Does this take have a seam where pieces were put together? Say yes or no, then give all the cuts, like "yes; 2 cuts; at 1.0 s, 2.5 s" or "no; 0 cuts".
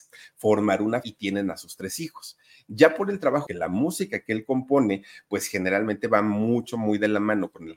yes; 2 cuts; at 1.0 s, 3.5 s